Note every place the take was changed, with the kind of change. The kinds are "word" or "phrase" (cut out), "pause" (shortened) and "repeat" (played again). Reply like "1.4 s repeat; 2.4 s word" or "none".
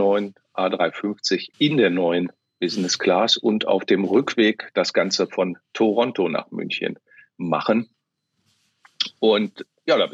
1.5 s pause; 2.5 s pause